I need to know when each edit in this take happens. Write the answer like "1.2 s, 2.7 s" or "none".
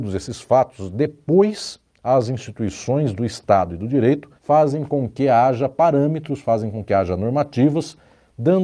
4.4 s